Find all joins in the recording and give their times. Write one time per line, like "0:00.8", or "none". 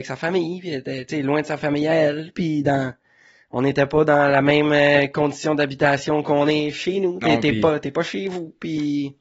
0:07.2